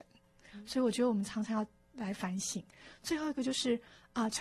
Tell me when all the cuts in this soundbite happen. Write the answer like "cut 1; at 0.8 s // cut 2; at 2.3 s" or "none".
none